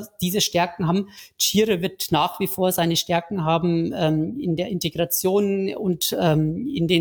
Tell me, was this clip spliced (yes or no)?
no